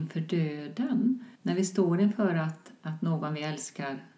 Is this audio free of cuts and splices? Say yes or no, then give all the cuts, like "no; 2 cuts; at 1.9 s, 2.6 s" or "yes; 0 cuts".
no; 1 cut; at 1.3 s